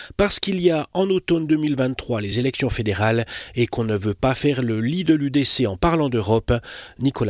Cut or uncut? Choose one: uncut